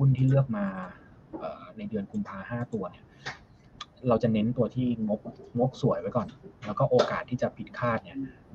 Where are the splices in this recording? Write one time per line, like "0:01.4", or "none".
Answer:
none

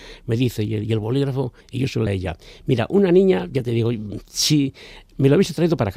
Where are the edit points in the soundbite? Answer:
0:01.6
0:02.1

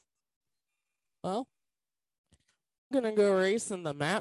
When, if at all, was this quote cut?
0:02.9

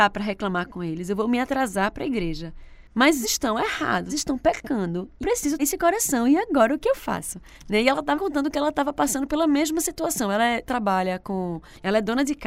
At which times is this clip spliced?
0:03.2
0:04.1
0:05.2
0:05.6
0:06.8
0:08.1
0:10.7

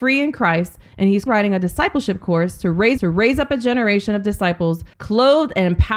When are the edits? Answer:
0:01.3
0:03.0
0:04.9

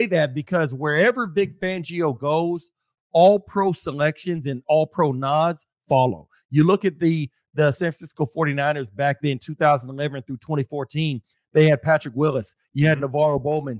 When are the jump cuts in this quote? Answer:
none

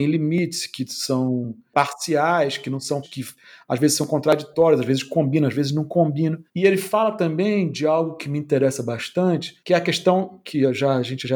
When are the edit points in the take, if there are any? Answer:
0:03.0
0:06.5
0:09.6

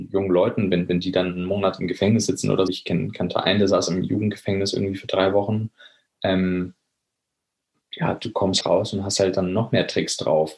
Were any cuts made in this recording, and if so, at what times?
0:02.7
0:08.6

